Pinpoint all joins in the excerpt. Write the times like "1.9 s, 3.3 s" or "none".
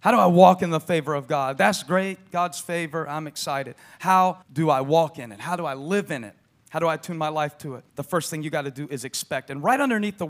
4.4 s, 7.9 s